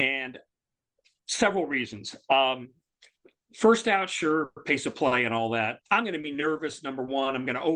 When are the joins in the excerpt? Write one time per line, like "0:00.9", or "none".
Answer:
0:05.8